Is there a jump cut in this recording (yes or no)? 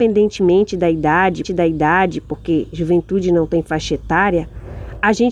yes